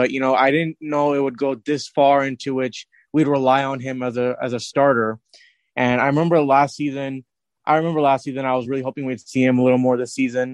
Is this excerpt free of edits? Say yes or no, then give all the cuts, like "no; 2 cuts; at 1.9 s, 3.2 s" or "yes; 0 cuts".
yes; 0 cuts